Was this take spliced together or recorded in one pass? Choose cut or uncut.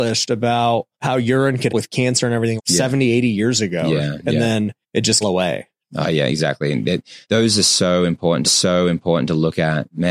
cut